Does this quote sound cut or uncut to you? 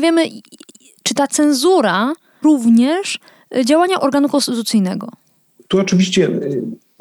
cut